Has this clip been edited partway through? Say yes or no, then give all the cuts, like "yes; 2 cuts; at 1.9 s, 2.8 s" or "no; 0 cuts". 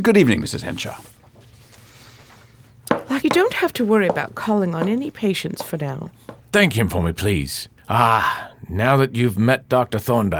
yes; 2 cuts; at 3.2 s, 7.8 s